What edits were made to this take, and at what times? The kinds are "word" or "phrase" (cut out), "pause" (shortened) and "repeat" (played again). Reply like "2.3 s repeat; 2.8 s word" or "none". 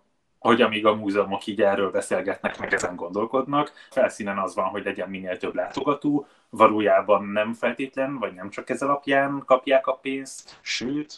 3.9 s phrase